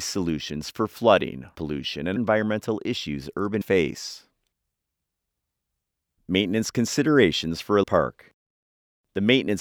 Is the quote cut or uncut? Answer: cut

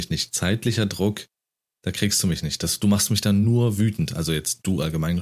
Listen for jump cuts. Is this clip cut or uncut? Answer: uncut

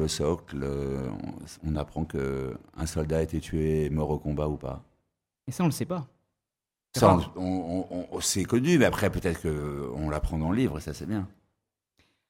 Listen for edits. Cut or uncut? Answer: uncut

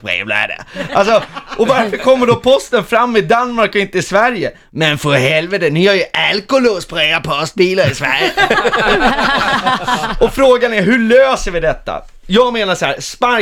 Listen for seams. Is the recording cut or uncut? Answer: uncut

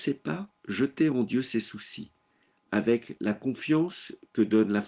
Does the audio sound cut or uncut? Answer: uncut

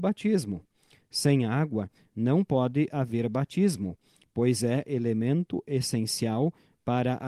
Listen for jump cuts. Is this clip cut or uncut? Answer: uncut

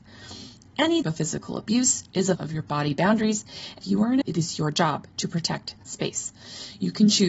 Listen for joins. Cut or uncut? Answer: cut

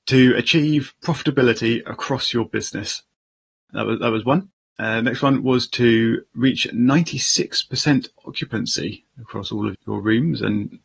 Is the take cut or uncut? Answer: cut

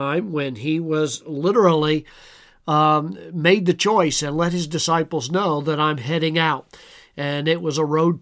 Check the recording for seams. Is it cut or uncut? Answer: uncut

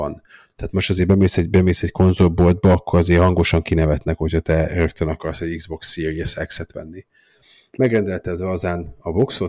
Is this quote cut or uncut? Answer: uncut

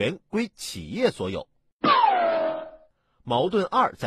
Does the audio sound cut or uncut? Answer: uncut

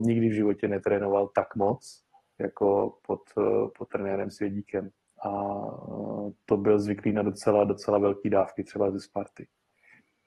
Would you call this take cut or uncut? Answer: uncut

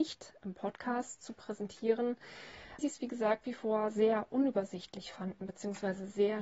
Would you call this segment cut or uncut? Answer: cut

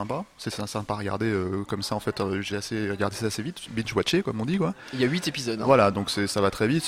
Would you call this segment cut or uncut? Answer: cut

